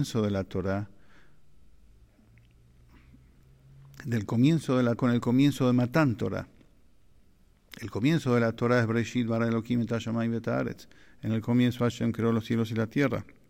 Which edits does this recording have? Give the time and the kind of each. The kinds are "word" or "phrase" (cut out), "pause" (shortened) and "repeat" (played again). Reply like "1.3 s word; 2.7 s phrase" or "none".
5.0 s word